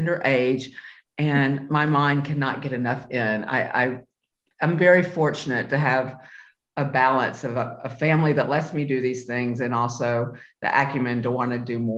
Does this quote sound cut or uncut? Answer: uncut